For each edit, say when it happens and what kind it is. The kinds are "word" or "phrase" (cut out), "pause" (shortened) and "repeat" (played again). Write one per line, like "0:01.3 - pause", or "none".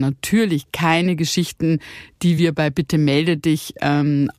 none